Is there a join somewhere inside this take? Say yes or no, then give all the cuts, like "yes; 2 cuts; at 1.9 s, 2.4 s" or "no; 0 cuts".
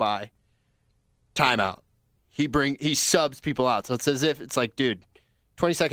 yes; 1 cut; at 2.2 s